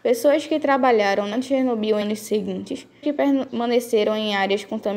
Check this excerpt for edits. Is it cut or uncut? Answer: cut